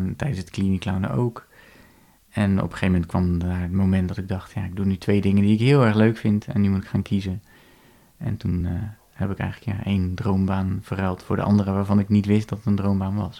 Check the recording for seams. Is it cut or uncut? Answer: uncut